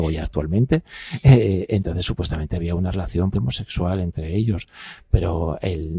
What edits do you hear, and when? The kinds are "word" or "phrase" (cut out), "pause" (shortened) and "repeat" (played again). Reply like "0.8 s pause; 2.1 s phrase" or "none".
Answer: 3.3 s word

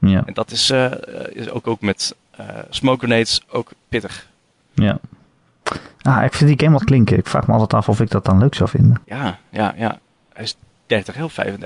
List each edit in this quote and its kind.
2.7 s word; 6.8 s phrase; 9.0 s pause

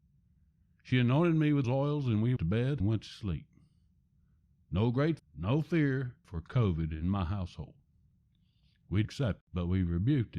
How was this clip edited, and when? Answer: 1.6 s word; 2.4 s word; 2.8 s word; 5.2 s word; 6.2 s word; 9.0 s word; 9.4 s word

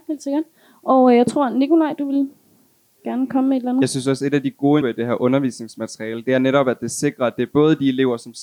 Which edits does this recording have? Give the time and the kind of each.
4.8 s word

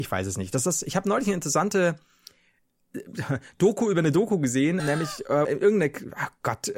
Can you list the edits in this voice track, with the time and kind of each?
4.8 s word; 5.4 s word

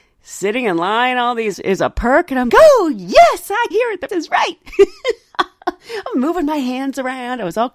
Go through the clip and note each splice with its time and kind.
1.5 s word; 2.5 s word; 3.7 s phrase; 4.1 s word

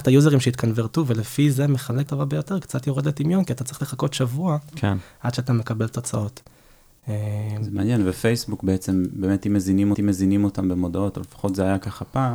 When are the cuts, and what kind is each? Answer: 2.1 s word; 9.9 s repeat

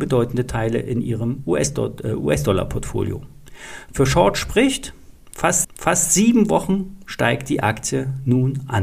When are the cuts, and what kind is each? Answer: 5.6 s repeat

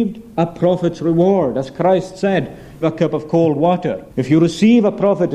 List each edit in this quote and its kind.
2.8 s word; 4.1 s pause

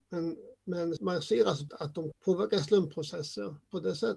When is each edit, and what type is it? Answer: 1.0 s word; 1.7 s word; 2.1 s word

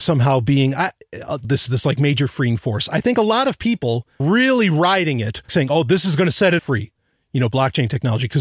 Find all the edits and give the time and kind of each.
1.4 s word; 4.2 s word; 5.5 s word; 6.6 s word

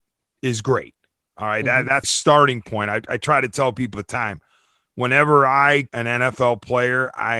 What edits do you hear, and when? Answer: 2.0 s word; 3.9 s word; 5.9 s word

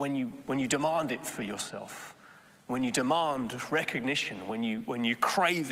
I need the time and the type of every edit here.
none

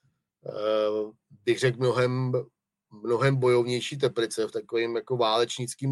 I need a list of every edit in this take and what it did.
none

